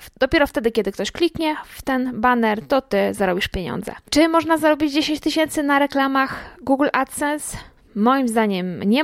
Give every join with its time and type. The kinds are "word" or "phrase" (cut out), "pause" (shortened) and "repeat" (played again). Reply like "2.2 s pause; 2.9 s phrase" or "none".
none